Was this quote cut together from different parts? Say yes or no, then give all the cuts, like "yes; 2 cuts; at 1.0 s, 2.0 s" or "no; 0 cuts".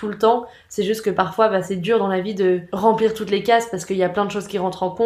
no; 0 cuts